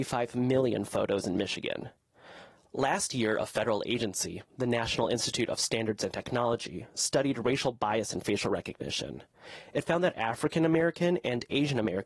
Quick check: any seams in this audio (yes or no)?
no